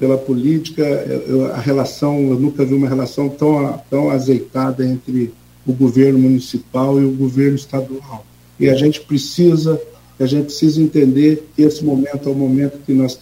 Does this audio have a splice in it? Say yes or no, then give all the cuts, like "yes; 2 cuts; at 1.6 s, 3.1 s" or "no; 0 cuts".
yes; 1 cut; at 11.5 s